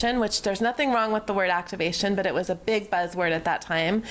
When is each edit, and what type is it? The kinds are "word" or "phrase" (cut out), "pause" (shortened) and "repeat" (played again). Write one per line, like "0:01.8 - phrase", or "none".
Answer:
none